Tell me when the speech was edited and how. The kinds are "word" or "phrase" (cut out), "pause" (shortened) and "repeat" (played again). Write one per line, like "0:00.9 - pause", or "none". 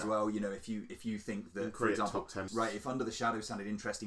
0:02.5 - word